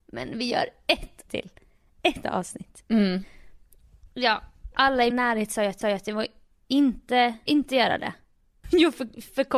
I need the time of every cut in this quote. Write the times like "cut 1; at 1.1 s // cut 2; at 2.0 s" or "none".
cut 1; at 1.3 s // cut 2; at 2.2 s // cut 3; at 4.7 s // cut 4; at 5.1 s // cut 5; at 5.8 s // cut 6; at 7.5 s // cut 7; at 8.6 s